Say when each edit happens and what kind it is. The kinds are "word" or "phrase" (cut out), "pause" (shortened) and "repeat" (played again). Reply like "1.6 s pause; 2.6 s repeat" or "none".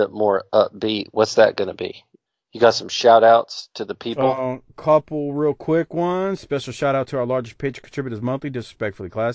2.3 s pause